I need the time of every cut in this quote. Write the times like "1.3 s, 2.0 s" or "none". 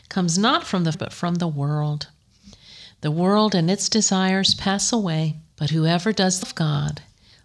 0.9 s, 5.5 s, 6.4 s